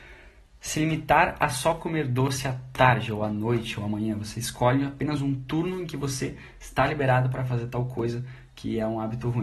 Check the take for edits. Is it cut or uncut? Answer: uncut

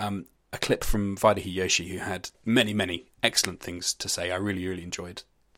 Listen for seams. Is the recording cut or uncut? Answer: cut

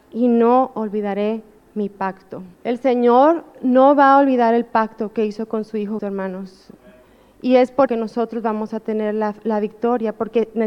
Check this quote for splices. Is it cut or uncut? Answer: cut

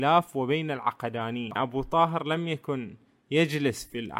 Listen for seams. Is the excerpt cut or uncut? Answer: cut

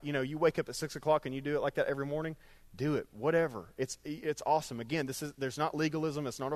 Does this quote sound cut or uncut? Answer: uncut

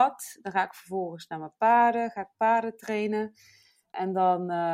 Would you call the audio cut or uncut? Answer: uncut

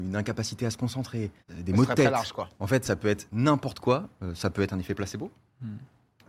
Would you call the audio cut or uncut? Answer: cut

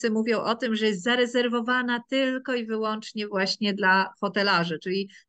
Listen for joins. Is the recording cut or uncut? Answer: uncut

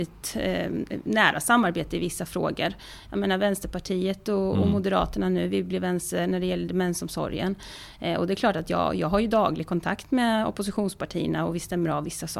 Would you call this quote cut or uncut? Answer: uncut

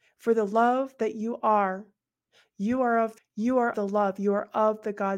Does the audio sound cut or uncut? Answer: cut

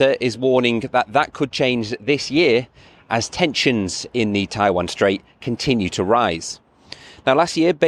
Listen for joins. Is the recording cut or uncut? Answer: uncut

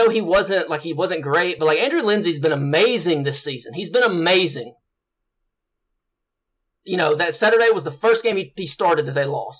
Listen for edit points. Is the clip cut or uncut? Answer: uncut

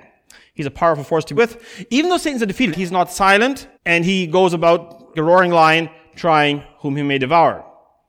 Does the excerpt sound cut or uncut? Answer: cut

